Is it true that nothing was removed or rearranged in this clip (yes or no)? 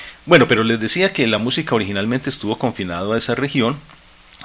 yes